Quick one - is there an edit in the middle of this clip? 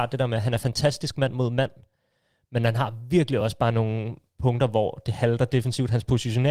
no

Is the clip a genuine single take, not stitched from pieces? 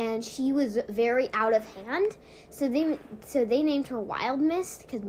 yes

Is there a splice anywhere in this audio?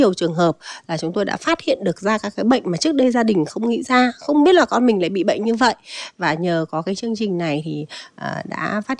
no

